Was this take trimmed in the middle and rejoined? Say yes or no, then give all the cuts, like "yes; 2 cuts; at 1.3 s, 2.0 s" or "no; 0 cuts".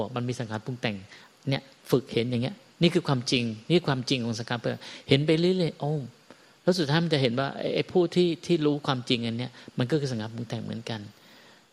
no; 0 cuts